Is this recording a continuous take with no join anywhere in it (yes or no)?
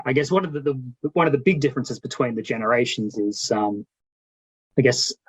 yes